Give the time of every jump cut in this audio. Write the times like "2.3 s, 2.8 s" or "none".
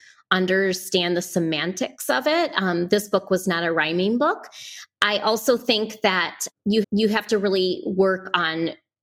6.8 s